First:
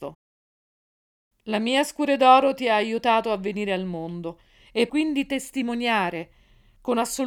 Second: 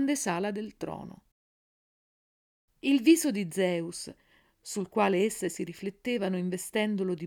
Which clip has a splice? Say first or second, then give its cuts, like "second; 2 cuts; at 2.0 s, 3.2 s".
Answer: first; 1 cut; at 4.9 s